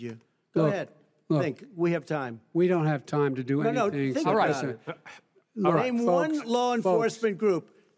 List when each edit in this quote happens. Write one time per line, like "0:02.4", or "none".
none